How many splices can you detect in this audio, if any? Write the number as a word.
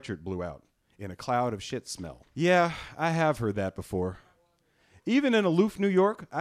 one